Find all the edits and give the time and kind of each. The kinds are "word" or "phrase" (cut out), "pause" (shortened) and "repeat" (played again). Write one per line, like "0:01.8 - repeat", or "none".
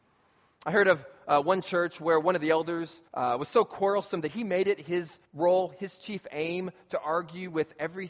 0:03.1 - pause
0:05.3 - pause